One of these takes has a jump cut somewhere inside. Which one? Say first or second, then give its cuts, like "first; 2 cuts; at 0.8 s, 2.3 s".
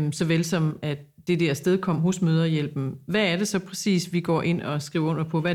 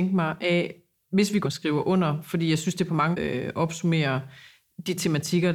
second; 2 cuts; at 1.4 s, 3.1 s